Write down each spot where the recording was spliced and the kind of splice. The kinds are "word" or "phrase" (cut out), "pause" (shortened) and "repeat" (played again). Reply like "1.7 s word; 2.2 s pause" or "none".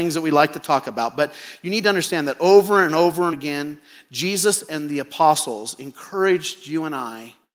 3.3 s word